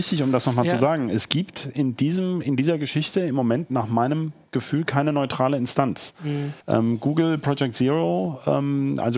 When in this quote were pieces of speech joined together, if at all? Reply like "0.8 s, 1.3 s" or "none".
6.6 s